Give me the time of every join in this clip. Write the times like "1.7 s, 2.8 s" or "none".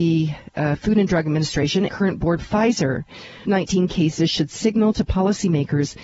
1.9 s, 2.4 s, 3.4 s